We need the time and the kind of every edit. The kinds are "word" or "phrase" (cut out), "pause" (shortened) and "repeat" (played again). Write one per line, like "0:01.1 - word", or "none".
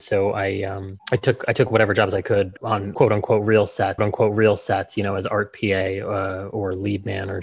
0:04.0 - repeat